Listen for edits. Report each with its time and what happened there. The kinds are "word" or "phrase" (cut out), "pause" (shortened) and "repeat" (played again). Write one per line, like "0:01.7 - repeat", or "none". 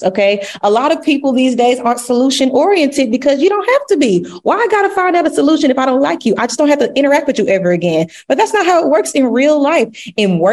none